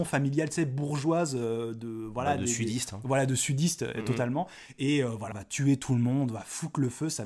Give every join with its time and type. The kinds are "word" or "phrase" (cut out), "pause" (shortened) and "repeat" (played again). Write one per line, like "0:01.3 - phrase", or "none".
0:05.3 - phrase